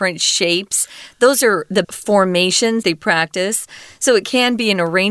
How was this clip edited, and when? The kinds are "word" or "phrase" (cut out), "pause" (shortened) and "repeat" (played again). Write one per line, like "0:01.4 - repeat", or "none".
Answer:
0:01.8 - word
0:02.8 - word